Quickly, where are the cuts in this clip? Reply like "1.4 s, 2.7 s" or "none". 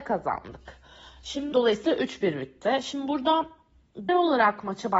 1.5 s, 1.9 s, 4.1 s